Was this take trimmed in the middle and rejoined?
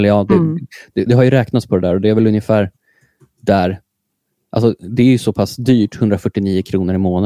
yes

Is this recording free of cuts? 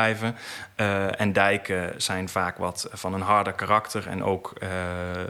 yes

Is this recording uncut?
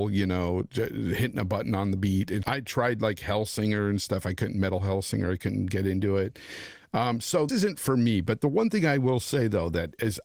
no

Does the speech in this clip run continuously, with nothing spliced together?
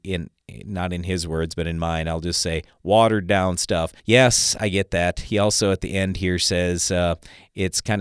no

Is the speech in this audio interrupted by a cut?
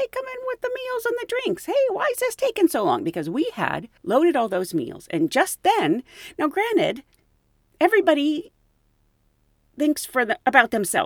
yes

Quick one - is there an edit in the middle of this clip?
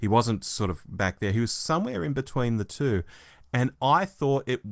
no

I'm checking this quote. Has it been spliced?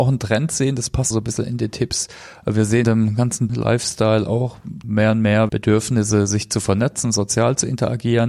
yes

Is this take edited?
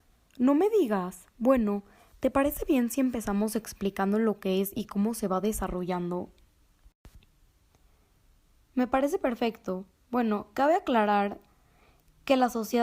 no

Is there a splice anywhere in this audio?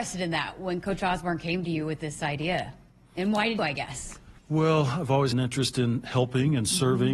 yes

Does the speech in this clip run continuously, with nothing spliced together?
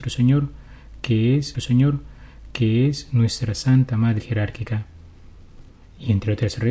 no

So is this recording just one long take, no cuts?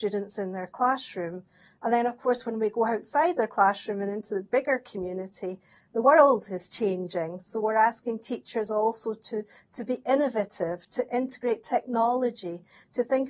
yes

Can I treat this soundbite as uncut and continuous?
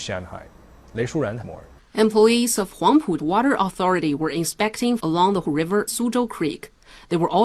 no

